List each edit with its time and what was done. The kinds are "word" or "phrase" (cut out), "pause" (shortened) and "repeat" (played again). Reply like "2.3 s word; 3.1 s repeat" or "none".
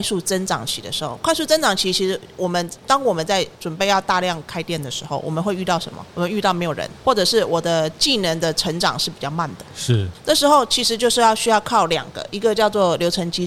2.8 s pause